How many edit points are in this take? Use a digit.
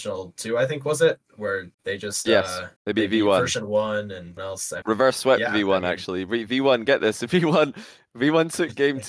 4